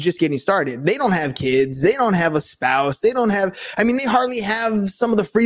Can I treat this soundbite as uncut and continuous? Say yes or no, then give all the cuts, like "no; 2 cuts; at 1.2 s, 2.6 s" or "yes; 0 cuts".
yes; 0 cuts